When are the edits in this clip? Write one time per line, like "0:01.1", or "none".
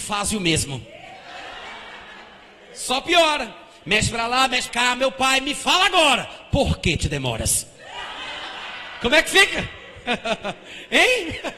0:04.7